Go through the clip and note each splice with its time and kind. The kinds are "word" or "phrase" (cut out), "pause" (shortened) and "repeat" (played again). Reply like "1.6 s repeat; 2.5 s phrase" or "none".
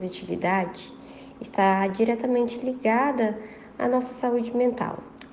none